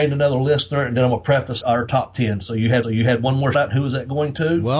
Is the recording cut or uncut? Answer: cut